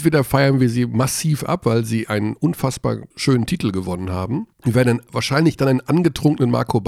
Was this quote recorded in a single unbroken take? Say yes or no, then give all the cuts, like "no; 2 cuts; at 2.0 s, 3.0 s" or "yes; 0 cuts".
no; 2 cuts; at 3.1 s, 4.5 s